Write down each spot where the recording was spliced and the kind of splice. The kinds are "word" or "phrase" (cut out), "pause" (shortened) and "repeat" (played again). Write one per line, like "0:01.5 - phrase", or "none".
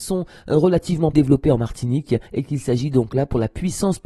0:01.1 - word
0:02.3 - pause